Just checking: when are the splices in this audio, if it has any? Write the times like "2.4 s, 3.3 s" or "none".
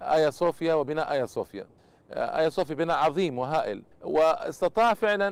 1.8 s, 3.9 s